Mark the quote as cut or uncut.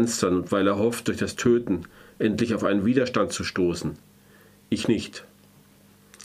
uncut